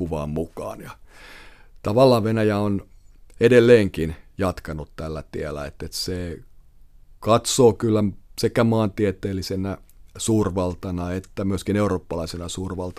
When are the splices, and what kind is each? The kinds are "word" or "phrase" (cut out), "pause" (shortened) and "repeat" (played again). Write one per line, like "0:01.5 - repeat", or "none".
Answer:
none